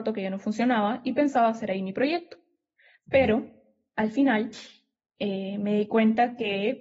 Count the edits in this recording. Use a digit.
0